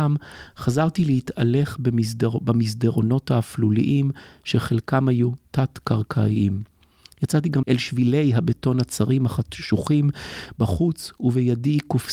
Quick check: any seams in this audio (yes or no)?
yes